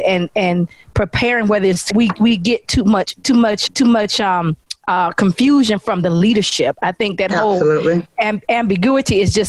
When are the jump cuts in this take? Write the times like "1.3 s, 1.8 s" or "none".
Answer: 1.9 s, 3.7 s